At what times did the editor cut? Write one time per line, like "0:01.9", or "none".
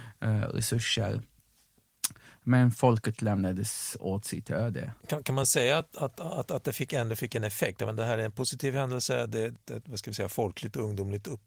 none